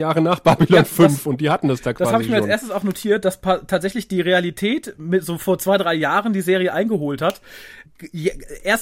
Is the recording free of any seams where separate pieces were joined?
yes; 0 cuts

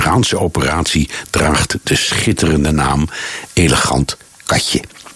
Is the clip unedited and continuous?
yes; 0 cuts

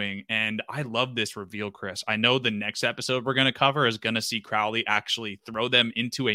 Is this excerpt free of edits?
yes; 0 cuts

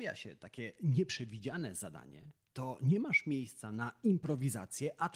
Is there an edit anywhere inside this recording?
yes; 1 cut; at 2.4 s

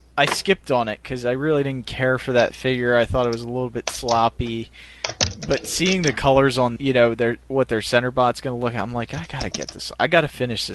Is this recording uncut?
no; 1 cut; at 6.8 s

